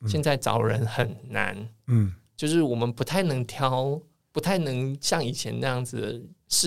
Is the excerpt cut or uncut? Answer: cut